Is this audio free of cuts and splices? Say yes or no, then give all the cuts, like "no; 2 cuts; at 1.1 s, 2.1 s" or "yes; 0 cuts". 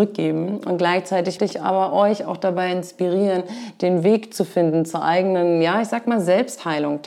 no; 1 cut; at 1.4 s